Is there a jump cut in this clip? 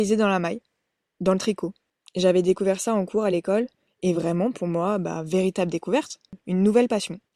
no; 0 cuts

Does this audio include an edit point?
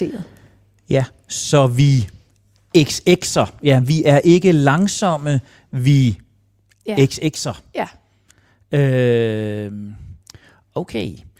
no; 0 cuts

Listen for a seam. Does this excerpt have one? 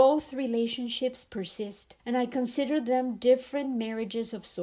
yes; 1 cut; at 2.0 s

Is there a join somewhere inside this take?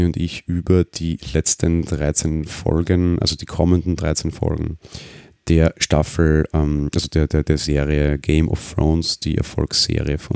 no; 0 cuts

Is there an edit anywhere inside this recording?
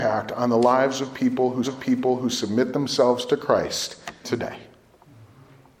yes; 2 cuts; at 1.6 s, 4.2 s

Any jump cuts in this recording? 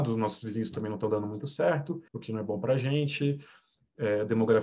yes; 1 cut; at 2.1 s

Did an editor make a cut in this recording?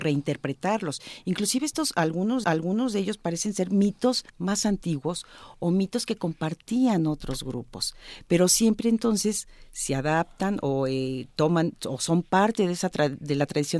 yes; 2 cuts; at 2.4 s, 4.3 s

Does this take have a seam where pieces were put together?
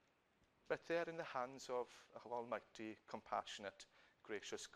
no; 0 cuts

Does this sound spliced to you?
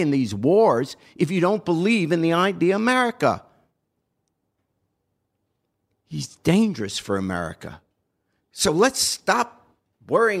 no; 0 cuts

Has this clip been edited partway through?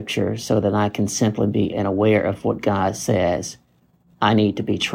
yes; 1 cut; at 1.7 s

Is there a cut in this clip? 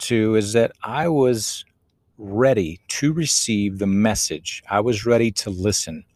no; 0 cuts

